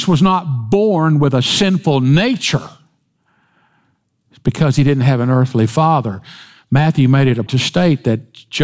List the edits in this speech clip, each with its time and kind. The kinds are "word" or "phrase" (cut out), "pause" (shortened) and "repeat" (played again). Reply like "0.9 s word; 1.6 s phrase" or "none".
7.5 s word